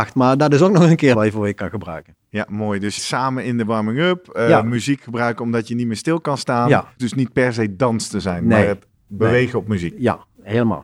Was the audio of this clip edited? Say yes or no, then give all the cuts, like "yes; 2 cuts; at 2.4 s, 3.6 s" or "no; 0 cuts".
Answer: yes; 3 cuts; at 1.1 s, 3.0 s, 7.0 s